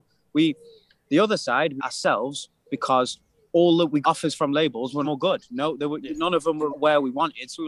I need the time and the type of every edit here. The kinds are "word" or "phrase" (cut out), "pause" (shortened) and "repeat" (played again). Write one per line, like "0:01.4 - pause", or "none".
0:01.8 - phrase
0:03.4 - pause
0:04.0 - word
0:05.0 - phrase
0:06.0 - word
0:06.7 - word